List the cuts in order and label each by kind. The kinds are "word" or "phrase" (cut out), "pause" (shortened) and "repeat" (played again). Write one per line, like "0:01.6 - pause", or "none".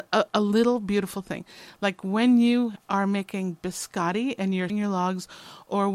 0:04.7 - word